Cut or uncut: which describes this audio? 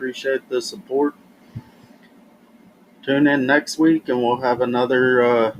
uncut